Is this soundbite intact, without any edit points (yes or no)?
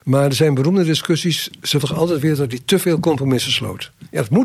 no